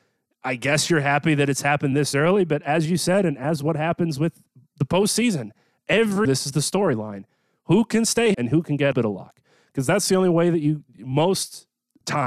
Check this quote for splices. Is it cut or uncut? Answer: cut